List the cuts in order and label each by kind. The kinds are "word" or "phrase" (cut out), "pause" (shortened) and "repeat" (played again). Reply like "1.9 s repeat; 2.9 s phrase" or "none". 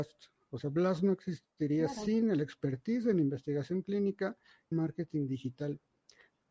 4.7 s phrase